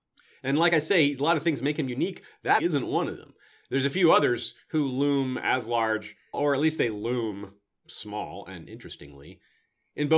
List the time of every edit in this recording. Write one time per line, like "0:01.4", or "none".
0:02.6
0:06.3